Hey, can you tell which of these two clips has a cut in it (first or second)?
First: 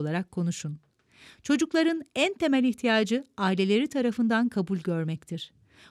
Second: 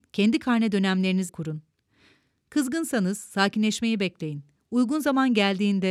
second